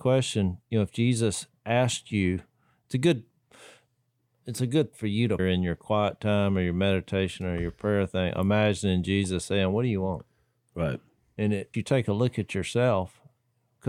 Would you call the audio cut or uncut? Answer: cut